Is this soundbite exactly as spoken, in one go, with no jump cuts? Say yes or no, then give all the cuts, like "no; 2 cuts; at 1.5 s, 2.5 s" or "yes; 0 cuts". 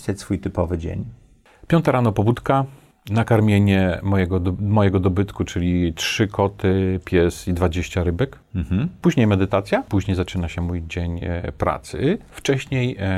yes; 0 cuts